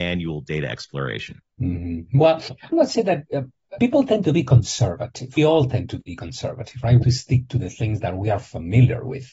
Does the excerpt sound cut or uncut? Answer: cut